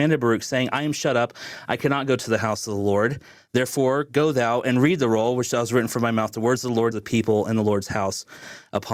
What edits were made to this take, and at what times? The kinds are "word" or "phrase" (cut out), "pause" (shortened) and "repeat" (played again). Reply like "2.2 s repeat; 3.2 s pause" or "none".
6.9 s phrase